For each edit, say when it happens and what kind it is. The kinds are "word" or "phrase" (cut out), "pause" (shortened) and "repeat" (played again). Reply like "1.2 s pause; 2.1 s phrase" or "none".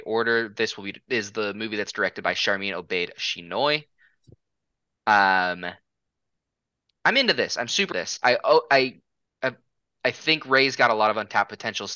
7.9 s word